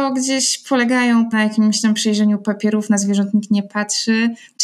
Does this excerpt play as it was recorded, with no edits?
no; 1 cut; at 1.3 s

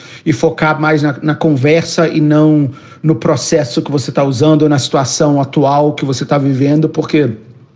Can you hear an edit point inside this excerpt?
no; 0 cuts

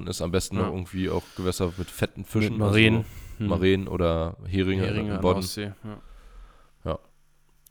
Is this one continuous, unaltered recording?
yes; 0 cuts

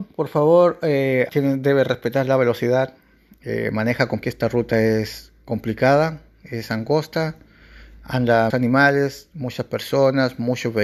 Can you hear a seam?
yes; 3 cuts; at 1.3 s, 4.2 s, 8.5 s

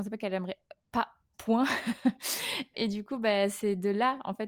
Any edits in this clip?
yes; 2 cuts; at 1.3 s, 2.7 s

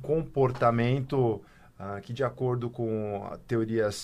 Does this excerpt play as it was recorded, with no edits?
yes; 0 cuts

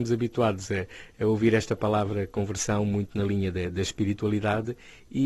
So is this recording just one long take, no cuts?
yes; 0 cuts

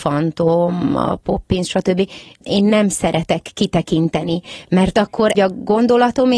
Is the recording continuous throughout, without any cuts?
no; 1 cut; at 5.3 s

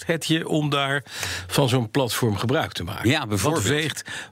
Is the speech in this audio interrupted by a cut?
no; 0 cuts

